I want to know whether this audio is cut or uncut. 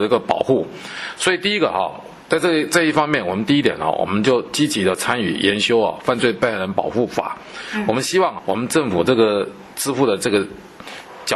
cut